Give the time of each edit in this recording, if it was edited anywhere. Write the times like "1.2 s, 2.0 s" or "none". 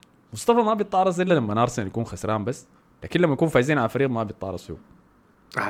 none